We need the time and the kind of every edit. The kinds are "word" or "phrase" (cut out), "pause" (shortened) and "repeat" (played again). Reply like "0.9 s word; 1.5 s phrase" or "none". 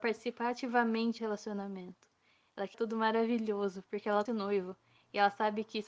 1.2 s word; 2.7 s word; 4.3 s word